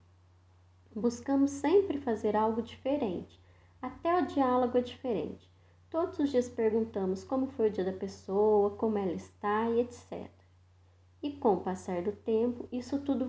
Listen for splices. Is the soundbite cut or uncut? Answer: uncut